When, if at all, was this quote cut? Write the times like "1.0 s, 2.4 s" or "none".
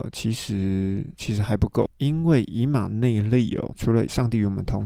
1.9 s